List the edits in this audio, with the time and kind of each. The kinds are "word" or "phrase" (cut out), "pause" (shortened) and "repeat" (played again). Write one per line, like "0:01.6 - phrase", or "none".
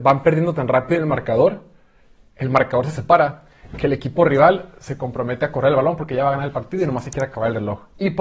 none